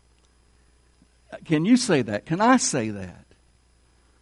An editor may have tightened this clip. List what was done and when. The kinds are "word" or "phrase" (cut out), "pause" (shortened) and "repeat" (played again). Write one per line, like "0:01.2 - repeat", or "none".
none